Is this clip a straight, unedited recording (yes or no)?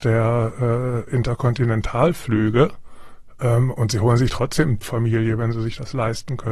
no